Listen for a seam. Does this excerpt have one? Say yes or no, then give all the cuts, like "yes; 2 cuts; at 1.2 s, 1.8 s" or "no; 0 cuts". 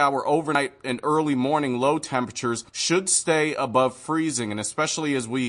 yes; 1 cut; at 2.7 s